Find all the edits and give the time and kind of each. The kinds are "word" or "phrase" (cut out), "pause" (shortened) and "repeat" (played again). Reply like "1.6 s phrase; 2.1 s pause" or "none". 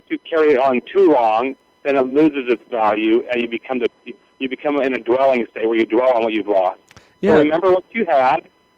none